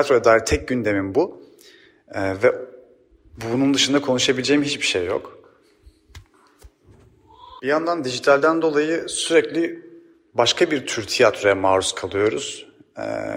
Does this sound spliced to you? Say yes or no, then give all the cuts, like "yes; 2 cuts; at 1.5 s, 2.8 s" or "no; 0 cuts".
no; 0 cuts